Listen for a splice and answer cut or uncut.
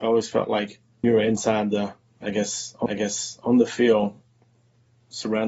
cut